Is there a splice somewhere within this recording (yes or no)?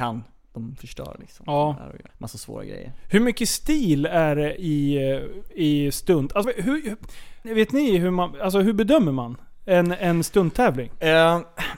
yes